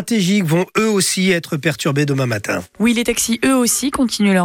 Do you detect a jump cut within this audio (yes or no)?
yes